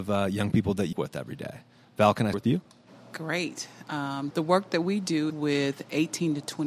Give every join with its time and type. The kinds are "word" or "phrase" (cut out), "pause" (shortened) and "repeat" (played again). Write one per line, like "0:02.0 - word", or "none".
0:00.9 - word
0:02.3 - word
0:04.3 - word
0:05.3 - word